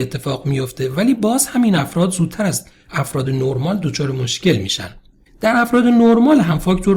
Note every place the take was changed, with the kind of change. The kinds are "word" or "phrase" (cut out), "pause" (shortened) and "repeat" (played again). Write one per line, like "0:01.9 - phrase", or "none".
none